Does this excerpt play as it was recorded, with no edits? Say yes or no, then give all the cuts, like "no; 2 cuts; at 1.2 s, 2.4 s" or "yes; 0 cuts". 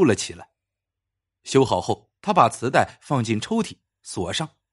no; 1 cut; at 2.2 s